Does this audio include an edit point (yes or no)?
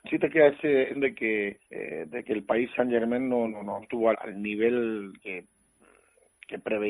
yes